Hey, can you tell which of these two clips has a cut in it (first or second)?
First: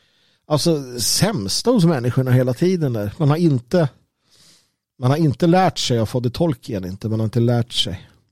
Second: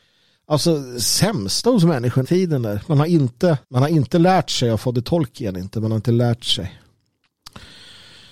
second